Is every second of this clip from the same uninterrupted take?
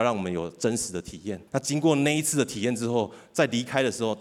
no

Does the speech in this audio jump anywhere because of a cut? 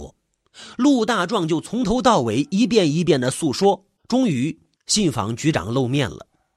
yes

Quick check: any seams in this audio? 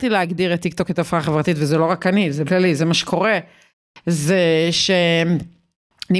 yes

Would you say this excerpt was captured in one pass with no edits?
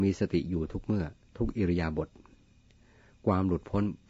yes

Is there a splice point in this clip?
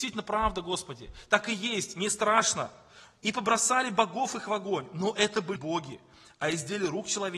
yes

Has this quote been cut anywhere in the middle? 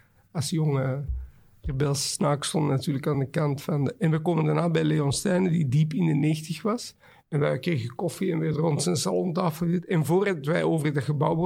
no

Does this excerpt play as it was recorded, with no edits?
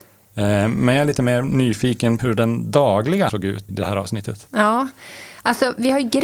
no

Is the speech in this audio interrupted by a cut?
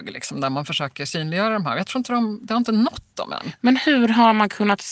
no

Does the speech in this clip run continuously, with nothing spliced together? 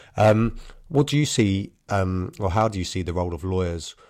yes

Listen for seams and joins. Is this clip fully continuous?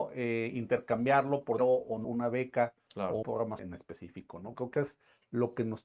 no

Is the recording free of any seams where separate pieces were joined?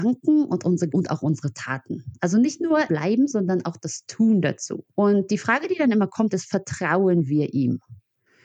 no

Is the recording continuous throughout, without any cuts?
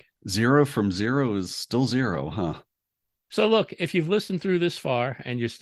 yes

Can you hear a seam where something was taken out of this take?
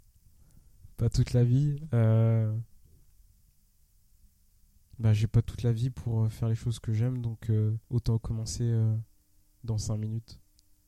yes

